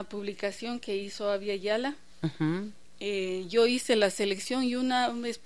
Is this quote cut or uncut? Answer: uncut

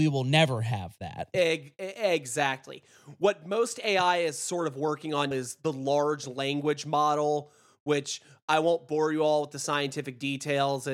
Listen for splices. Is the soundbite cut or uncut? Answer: cut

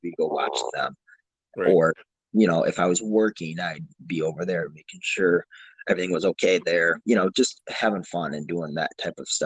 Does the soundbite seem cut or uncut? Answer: uncut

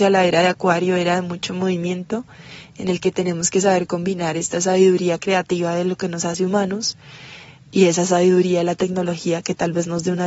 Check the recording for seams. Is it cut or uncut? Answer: uncut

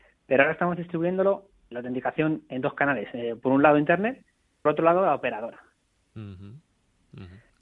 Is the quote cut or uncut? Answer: cut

